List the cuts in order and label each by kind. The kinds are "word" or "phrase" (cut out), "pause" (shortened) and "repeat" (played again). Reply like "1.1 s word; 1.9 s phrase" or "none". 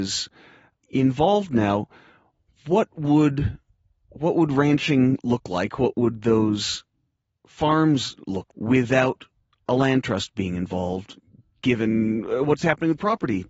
8.5 s word